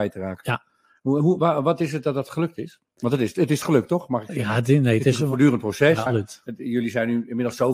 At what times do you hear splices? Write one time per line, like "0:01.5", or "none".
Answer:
0:06.1